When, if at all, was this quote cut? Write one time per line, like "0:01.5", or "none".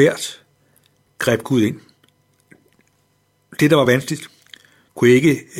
none